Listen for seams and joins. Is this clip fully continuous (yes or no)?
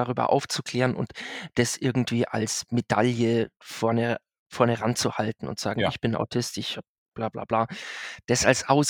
yes